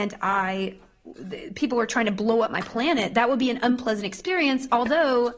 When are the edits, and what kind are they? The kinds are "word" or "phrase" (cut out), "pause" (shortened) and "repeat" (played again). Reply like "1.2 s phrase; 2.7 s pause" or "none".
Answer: none